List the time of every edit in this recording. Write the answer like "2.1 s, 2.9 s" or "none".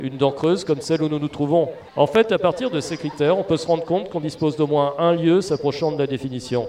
1.9 s